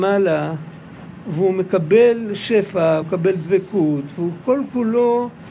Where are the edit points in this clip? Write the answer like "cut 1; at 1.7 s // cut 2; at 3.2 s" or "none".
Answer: cut 1; at 3.0 s